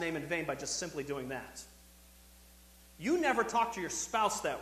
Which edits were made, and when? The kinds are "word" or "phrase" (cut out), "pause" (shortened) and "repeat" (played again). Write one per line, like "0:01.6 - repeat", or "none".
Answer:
none